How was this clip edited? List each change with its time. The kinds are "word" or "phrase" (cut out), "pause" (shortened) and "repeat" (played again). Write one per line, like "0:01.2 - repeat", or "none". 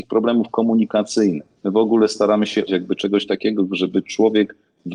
0:01.6 - pause
0:02.7 - word